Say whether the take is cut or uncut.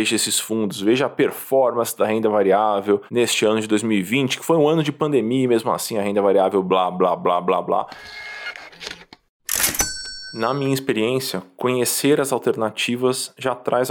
cut